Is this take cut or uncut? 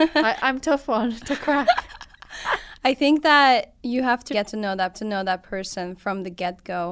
cut